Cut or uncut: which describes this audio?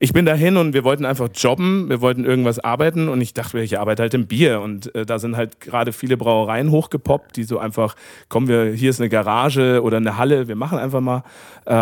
uncut